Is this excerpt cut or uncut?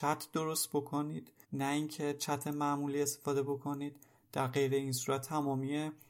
cut